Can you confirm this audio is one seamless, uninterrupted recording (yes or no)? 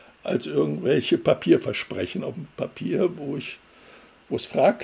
no